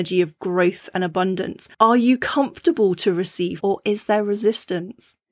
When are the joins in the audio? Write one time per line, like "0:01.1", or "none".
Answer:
0:01.7
0:03.6